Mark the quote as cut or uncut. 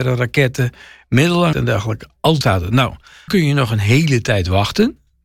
cut